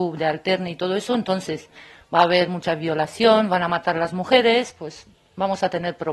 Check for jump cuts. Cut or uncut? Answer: uncut